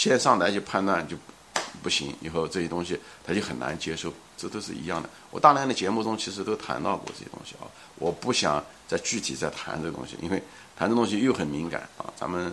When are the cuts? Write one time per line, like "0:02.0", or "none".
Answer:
none